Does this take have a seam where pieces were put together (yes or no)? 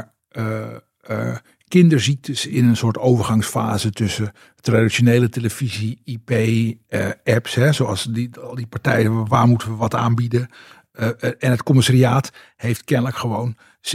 no